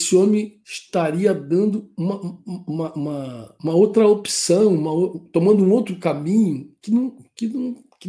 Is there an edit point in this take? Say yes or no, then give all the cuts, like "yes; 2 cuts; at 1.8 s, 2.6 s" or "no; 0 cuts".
no; 0 cuts